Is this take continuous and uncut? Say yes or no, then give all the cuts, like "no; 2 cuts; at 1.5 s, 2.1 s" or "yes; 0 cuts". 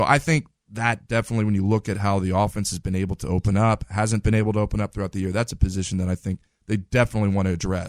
yes; 0 cuts